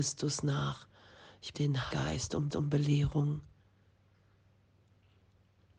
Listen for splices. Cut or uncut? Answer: cut